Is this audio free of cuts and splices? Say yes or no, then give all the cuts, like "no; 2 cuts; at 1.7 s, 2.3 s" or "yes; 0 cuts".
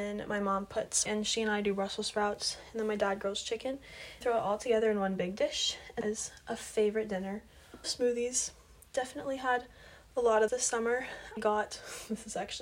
no; 6 cuts; at 1.1 s, 4.2 s, 6.0 s, 7.8 s, 10.5 s, 11.4 s